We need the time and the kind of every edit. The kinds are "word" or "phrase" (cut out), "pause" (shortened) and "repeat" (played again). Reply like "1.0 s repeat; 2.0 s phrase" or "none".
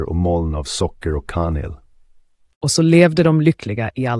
none